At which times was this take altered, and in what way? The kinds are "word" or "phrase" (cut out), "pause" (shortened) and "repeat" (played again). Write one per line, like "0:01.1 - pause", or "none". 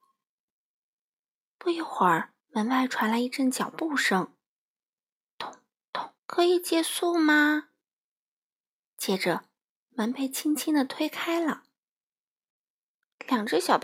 0:02.4 - pause
0:06.2 - pause